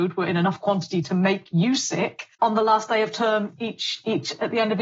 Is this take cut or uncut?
cut